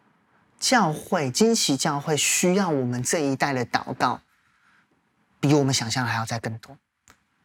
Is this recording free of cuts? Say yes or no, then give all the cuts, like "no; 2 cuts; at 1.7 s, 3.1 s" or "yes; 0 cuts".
yes; 0 cuts